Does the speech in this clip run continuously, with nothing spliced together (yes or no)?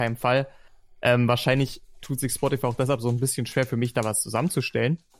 yes